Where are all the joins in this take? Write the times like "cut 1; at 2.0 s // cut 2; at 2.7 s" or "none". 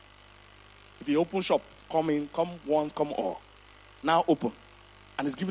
none